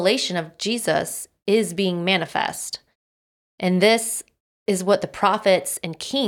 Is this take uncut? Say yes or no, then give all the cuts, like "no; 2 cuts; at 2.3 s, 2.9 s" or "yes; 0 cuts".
yes; 0 cuts